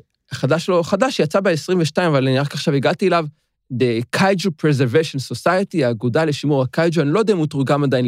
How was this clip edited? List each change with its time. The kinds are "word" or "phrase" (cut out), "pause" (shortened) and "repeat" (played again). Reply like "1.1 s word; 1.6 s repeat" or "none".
none

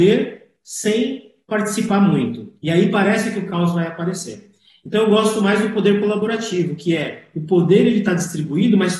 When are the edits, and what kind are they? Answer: none

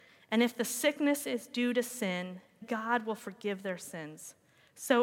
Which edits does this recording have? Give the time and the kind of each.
2.6 s word

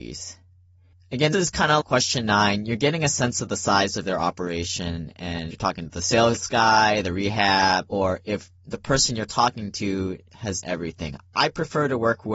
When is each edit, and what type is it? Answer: 1.3 s word; 1.8 s word; 5.5 s word; 10.6 s word

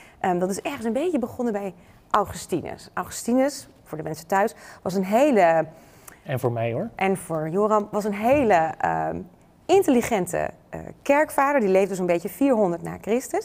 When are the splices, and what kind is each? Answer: none

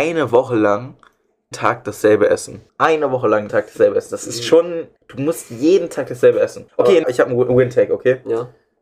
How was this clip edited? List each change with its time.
1.5 s word; 2.7 s pause; 3.5 s word; 5.0 s pause; 6.7 s pause; 7.0 s phrase

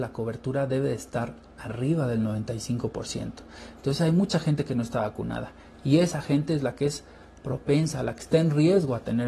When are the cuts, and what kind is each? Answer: none

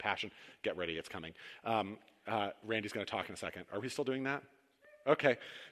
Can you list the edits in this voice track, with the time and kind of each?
none

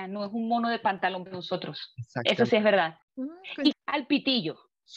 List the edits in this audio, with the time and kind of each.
1.3 s word; 3.7 s phrase

